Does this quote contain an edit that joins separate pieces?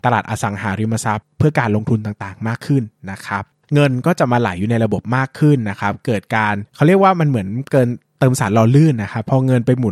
no; 0 cuts

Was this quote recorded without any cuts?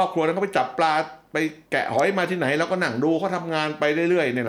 no; 1 cut; at 1.6 s

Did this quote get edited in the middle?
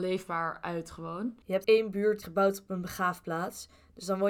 yes; 2 cuts; at 1.6 s, 2.2 s

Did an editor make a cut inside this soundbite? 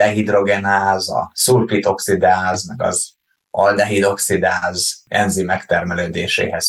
no; 0 cuts

